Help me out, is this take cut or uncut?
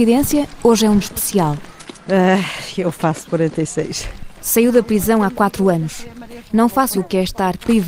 cut